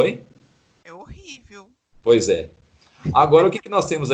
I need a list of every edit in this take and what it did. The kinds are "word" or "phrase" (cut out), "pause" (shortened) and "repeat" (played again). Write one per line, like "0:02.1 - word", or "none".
0:01.9 - pause